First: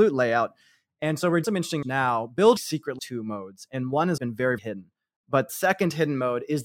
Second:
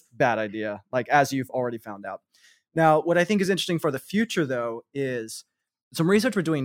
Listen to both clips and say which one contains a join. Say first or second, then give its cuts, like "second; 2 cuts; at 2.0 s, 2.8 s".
first; 7 cuts; at 1.4 s, 1.8 s, 2.6 s, 3.0 s, 4.2 s, 4.6 s, 5.5 s